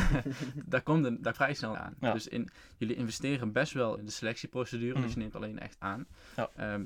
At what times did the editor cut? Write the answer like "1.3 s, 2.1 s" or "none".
1.3 s, 1.7 s, 4.0 s, 5.8 s